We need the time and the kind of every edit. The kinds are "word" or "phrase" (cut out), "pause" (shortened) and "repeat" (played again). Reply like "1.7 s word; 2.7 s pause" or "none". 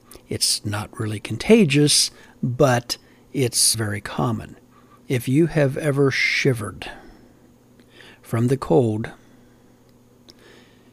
3.7 s word